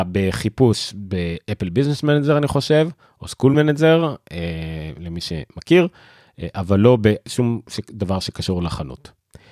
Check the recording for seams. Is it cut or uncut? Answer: uncut